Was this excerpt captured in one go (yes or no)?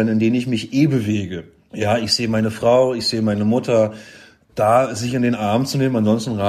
yes